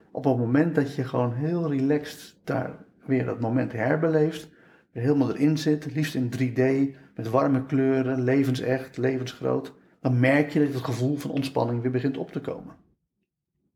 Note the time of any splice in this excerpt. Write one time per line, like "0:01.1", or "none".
0:09.9